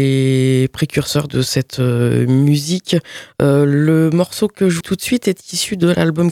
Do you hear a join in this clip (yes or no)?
yes